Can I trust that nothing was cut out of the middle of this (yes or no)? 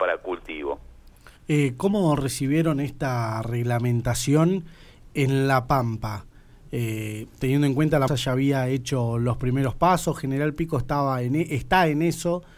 no